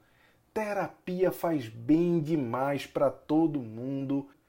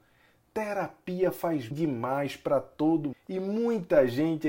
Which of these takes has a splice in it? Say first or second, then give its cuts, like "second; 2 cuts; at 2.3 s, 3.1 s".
second; 2 cuts; at 1.7 s, 3.1 s